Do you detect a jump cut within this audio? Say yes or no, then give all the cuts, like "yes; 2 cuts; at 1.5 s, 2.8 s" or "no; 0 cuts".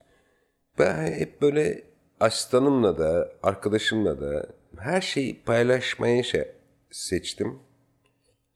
no; 0 cuts